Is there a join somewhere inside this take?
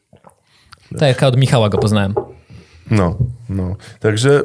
no; 0 cuts

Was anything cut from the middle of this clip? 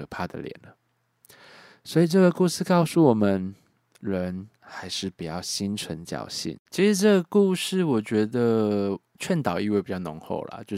yes; 2 cuts; at 4.5 s, 6.7 s

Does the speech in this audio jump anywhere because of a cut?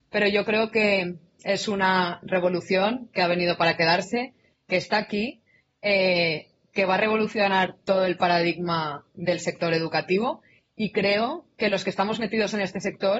no; 0 cuts

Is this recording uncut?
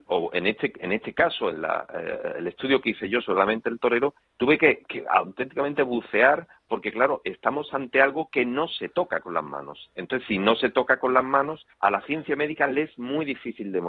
no; 2 cuts; at 4.2 s, 11.7 s

